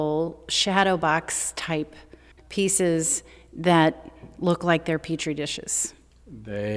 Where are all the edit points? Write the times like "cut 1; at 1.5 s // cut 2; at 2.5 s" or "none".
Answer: cut 1; at 2.3 s